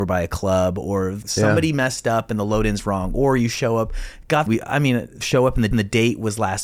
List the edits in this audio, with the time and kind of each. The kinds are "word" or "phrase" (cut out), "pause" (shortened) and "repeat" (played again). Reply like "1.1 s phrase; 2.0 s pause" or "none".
1.2 s word; 4.5 s word; 5.7 s repeat